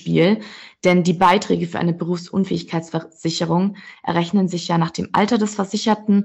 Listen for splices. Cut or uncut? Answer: uncut